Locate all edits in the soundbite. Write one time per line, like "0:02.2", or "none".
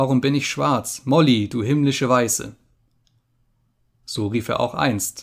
none